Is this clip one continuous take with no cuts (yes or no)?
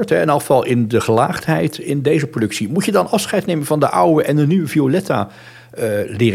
yes